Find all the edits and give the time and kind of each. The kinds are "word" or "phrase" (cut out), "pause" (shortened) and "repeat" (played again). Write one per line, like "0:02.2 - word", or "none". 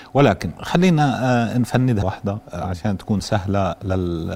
0:02.0 - word

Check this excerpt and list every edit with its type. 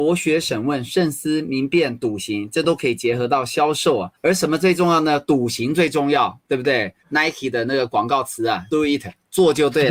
0:04.1 - pause
0:07.0 - pause
0:08.7 - word

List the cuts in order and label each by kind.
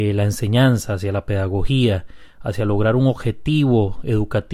none

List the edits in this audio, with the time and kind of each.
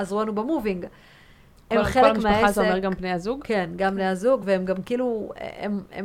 none

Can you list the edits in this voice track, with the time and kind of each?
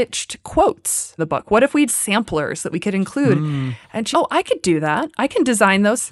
0:01.2 - word
0:01.9 - phrase
0:04.1 - word

